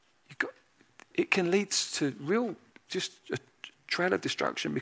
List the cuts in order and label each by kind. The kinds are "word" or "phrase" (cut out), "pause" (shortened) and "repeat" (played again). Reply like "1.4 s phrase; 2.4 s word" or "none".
none